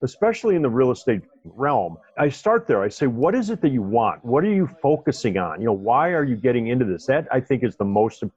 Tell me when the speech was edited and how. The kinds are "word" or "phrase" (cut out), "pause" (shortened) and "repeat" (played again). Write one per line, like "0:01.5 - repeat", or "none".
0:02.1 - pause